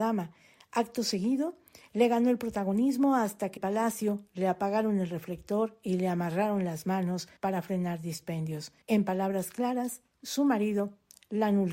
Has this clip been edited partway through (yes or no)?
yes